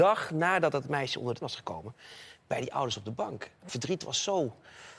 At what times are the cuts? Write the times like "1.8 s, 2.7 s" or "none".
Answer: 1.4 s, 3.7 s